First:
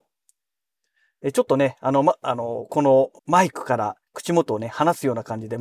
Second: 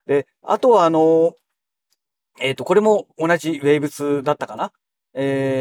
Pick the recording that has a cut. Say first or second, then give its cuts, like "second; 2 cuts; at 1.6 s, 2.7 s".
first; 2 cuts; at 3.2 s, 4.1 s